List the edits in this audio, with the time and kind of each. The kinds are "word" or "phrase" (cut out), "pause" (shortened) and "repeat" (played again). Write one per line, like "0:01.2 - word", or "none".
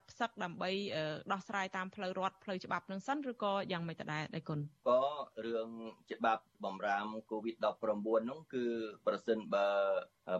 none